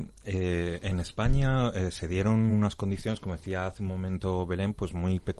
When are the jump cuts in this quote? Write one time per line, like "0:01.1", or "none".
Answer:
none